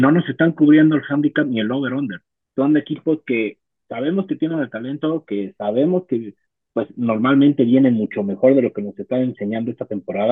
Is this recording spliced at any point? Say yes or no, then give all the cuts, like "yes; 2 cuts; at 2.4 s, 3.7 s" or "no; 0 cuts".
no; 0 cuts